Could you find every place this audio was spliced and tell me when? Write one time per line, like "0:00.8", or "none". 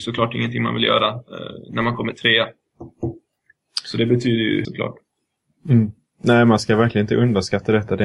0:04.6